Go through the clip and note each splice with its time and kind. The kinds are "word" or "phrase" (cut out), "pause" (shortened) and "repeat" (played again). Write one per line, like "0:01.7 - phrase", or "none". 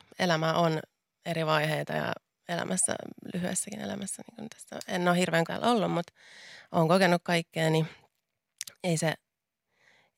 0:05.5 - word

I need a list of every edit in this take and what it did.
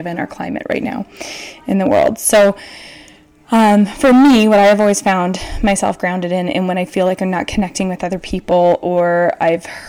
none

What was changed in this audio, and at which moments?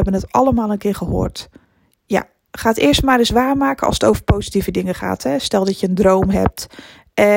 0:01.6 - pause

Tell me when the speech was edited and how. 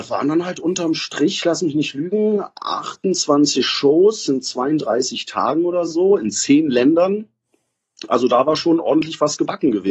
none

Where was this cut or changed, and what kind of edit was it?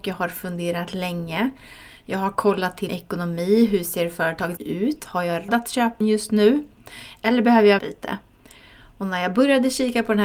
0:02.9 - word
0:04.6 - word
0:05.5 - word
0:06.0 - phrase
0:07.8 - word

